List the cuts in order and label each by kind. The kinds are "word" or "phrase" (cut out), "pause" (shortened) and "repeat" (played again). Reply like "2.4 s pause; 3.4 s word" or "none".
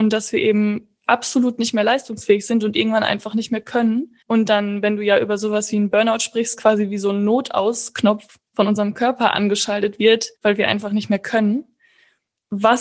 4.2 s pause; 8.5 s pause; 10.4 s pause